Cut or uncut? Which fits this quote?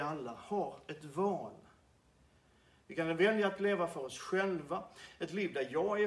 uncut